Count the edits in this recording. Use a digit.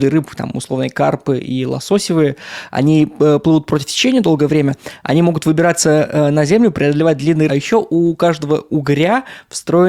1